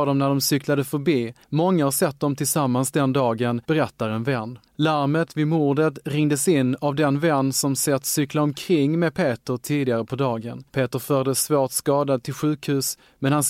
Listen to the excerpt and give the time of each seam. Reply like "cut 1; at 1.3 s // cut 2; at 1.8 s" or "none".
cut 1; at 1.4 s // cut 2; at 3.6 s // cut 3; at 4.7 s // cut 4; at 10.7 s

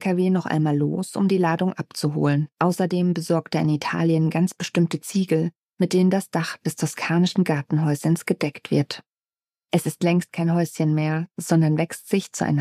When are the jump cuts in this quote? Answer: cut 1; at 2.5 s

